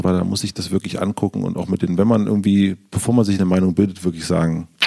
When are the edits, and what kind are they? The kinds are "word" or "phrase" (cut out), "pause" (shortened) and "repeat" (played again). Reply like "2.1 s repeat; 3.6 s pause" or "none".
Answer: none